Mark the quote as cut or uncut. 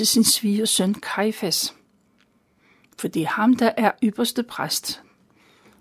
uncut